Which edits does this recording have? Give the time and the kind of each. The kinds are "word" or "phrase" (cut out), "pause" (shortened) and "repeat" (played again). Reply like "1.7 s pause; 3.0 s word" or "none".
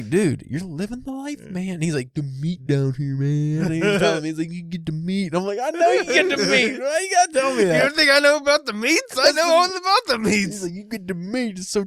none